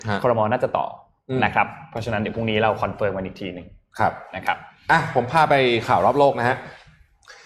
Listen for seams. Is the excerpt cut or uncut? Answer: uncut